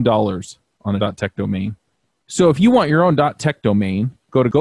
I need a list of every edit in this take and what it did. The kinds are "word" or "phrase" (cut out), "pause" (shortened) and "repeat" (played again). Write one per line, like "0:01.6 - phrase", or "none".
none